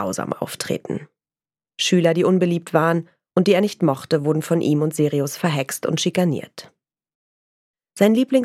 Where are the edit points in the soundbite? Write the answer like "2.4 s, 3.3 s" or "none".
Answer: none

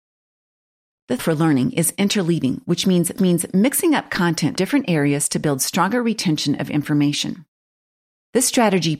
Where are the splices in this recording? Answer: 1.2 s, 3.2 s, 4.6 s

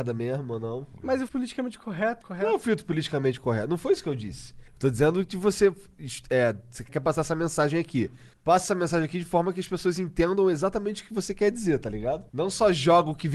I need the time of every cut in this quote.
1.3 s, 2.2 s, 4.7 s, 6.9 s, 8.3 s, 12.3 s

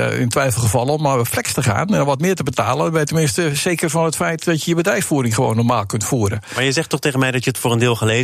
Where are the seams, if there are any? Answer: none

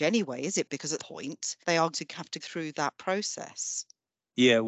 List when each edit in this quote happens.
1.0 s, 1.6 s, 1.9 s, 2.4 s

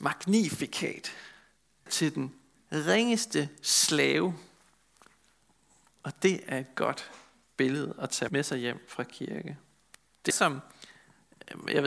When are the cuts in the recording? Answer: 1.9 s, 8.3 s, 10.3 s

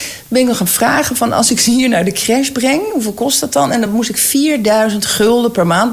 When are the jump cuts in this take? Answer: none

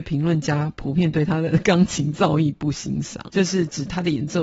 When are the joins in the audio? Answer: 3.3 s

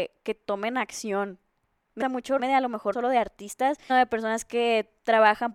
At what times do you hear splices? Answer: 2.0 s, 2.4 s, 2.9 s, 3.9 s

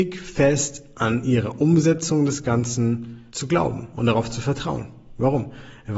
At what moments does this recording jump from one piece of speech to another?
3.3 s

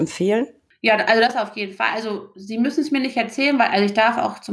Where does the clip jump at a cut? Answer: none

